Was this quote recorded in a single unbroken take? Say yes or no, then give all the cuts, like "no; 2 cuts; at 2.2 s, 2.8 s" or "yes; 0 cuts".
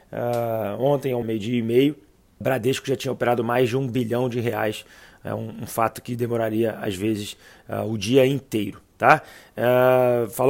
no; 2 cuts; at 1.2 s, 2.4 s